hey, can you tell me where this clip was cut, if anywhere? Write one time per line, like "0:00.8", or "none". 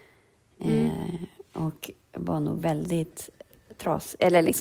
none